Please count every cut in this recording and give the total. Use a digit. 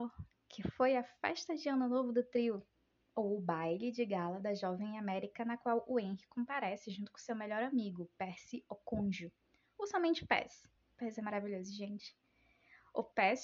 0